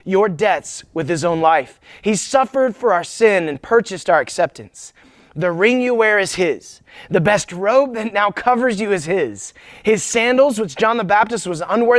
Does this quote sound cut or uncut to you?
uncut